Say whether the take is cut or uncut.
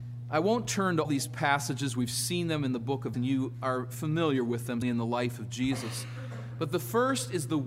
cut